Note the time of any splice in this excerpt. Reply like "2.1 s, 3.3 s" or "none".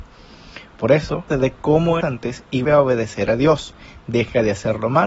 1.3 s, 2.0 s, 2.6 s

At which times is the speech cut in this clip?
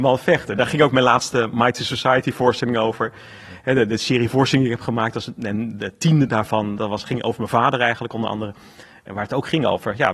none

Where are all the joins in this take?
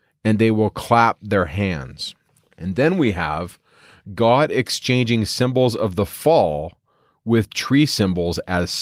2.3 s

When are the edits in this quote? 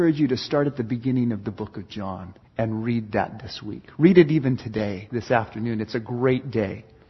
2.4 s

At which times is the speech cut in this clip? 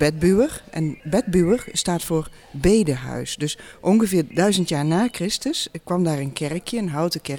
1.0 s

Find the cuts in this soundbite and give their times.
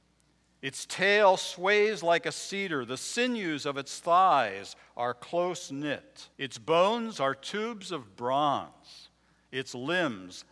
6.3 s

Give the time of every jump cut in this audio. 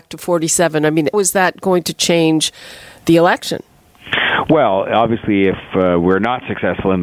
1.1 s

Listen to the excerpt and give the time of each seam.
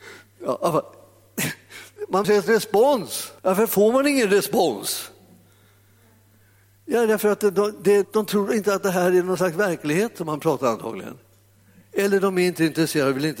2.2 s, 3.4 s, 8.0 s

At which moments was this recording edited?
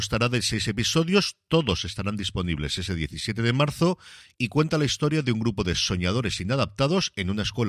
none

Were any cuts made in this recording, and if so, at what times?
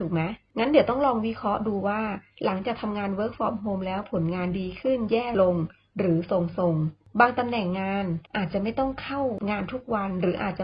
none

